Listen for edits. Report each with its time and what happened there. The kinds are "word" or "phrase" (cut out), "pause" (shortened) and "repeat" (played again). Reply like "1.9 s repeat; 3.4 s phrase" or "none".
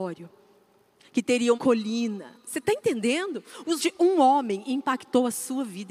1.5 s word; 3.8 s word